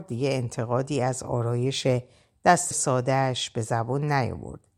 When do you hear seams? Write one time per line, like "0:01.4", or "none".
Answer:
0:02.7

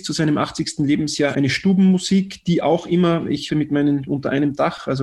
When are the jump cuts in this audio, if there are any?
0:01.3
0:03.5
0:04.1

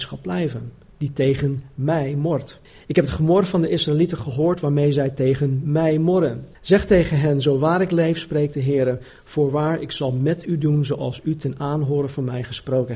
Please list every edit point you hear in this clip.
0:02.6
0:06.5

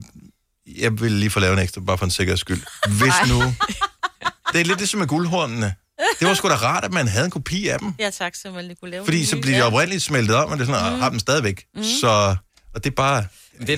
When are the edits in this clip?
0:12.5

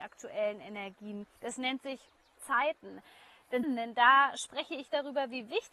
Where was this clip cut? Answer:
0:01.4
0:02.4
0:03.6

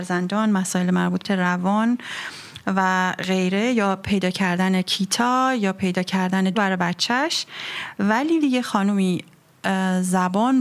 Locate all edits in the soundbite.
0:01.2
0:06.5
0:08.4

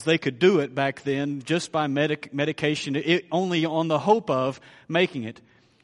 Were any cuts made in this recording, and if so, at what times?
none

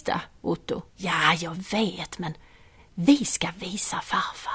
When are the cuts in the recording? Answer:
0:00.9
0:02.8

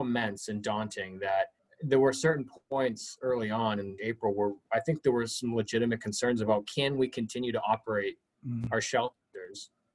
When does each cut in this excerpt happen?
0:01.6
0:04.0
0:04.6

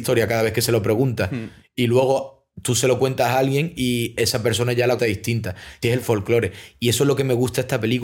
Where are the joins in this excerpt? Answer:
0:05.0
0:05.8

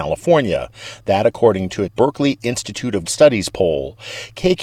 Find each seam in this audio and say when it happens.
0:01.9
0:03.1

